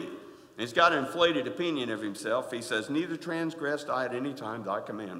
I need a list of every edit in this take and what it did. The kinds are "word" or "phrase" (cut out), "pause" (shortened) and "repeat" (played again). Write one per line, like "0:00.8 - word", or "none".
none